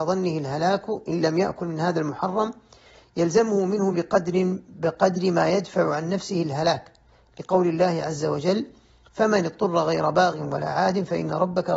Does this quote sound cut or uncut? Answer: uncut